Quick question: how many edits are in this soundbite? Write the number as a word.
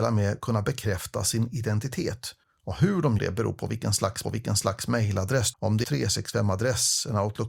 five